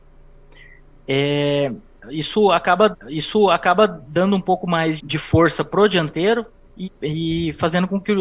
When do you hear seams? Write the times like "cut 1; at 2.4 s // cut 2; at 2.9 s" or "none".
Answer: cut 1; at 2.9 s // cut 2; at 5.0 s // cut 3; at 6.8 s